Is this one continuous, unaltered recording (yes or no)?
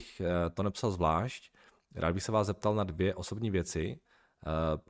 yes